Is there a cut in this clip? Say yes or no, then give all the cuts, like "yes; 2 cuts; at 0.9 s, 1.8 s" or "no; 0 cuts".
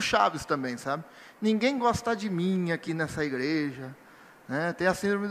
no; 0 cuts